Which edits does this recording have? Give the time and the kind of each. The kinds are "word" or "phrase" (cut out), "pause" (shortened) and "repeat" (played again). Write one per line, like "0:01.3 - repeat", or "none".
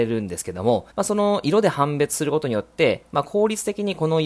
0:00.9 - pause